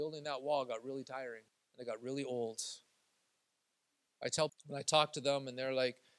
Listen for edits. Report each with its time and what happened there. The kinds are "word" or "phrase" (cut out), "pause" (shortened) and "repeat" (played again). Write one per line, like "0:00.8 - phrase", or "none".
0:01.5 - pause
0:04.5 - phrase